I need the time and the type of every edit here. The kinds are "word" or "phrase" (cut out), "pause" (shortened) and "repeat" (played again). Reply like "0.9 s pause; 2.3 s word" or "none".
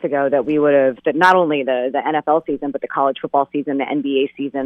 1.0 s word

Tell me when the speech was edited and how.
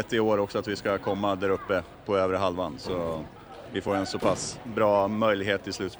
none

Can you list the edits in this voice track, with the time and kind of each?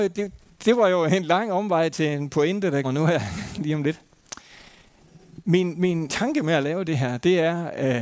2.8 s word; 6.1 s word

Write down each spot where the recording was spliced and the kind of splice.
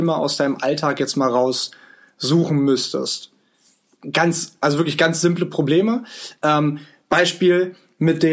none

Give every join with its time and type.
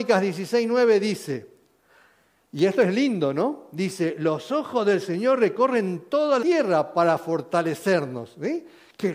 6.4 s word

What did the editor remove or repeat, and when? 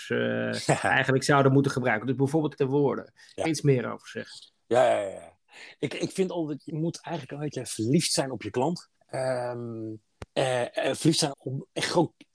2.6 s word; 3.4 s phrase; 6.7 s word; 9.0 s pause; 10.3 s pause; 11.3 s word

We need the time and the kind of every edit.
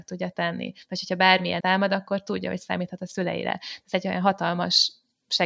1.6 s word

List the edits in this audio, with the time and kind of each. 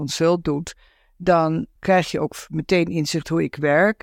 1.8 s pause

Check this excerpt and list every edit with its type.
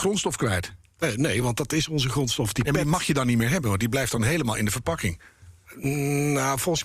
none

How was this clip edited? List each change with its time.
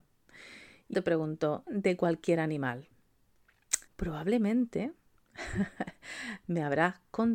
0.9 s word; 1.7 s phrase; 3.9 s pause

